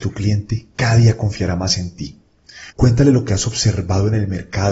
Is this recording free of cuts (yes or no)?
no